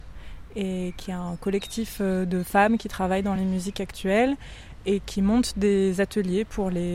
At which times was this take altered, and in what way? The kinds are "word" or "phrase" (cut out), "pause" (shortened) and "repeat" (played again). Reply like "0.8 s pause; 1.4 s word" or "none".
none